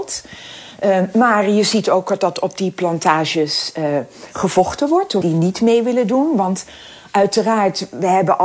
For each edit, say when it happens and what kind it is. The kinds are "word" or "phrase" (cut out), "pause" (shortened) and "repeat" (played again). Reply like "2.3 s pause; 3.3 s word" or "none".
5.2 s word